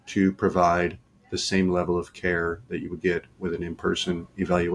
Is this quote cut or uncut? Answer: uncut